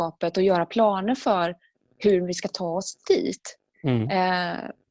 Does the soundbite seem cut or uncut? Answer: uncut